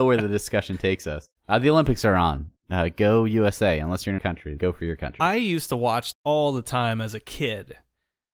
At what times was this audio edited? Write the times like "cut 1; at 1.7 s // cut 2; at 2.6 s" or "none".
cut 1; at 1.4 s // cut 2; at 2.6 s // cut 3; at 4.2 s // cut 4; at 4.6 s // cut 5; at 6.1 s